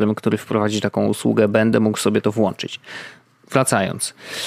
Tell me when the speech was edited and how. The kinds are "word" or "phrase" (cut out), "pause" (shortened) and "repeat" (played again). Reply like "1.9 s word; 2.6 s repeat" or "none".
none